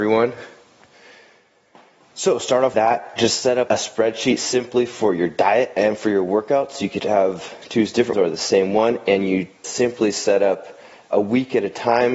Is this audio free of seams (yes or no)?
no